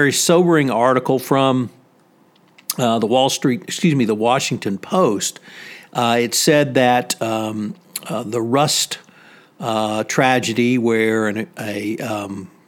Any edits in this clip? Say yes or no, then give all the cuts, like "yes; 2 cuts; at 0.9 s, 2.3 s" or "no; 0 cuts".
no; 0 cuts